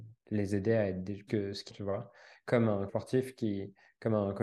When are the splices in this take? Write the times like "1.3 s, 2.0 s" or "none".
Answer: 1.3 s, 1.7 s, 2.9 s